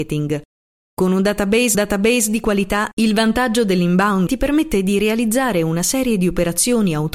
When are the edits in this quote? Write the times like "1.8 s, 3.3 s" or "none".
1.7 s, 4.3 s

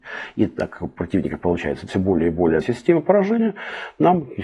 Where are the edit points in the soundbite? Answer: 1.9 s, 2.6 s

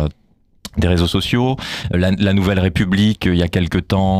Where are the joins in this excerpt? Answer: 1.9 s

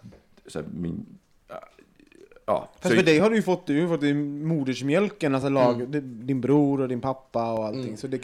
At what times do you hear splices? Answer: none

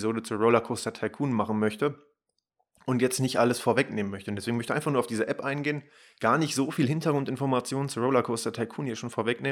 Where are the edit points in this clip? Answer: none

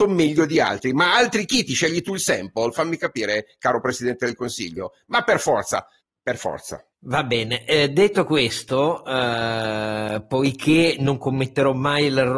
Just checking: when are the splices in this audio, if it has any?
6.9 s

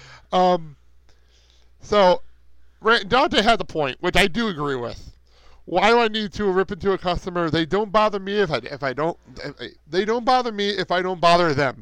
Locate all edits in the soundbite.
9.8 s

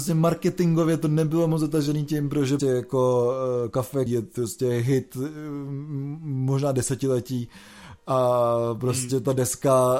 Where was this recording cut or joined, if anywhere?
2.6 s, 4.1 s

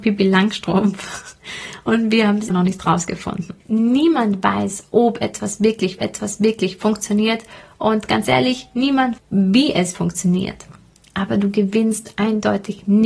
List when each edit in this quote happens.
2.5 s, 3.6 s, 6.0 s, 9.2 s, 9.9 s

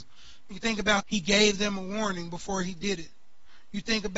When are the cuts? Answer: 1.0 s

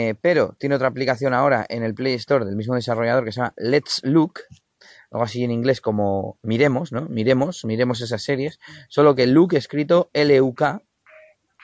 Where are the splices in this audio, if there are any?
none

